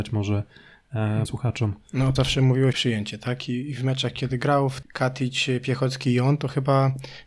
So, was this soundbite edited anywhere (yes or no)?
yes